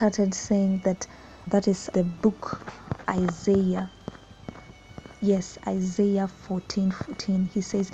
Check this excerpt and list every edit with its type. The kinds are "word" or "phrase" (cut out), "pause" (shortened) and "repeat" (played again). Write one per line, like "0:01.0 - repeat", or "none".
0:01.5 - word
0:01.9 - word
0:03.0 - word